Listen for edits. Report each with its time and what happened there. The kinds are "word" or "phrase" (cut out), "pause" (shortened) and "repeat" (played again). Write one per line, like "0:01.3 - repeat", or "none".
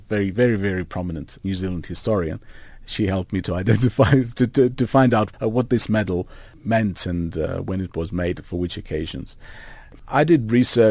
0:01.3 - word
0:04.7 - word
0:08.4 - word